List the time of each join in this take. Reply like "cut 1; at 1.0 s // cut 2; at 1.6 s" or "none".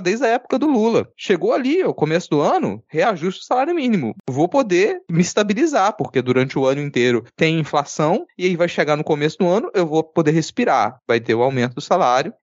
none